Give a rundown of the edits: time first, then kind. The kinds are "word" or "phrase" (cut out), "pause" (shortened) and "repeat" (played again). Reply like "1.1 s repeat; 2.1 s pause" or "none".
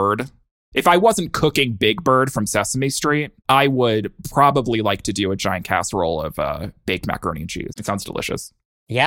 3.4 s pause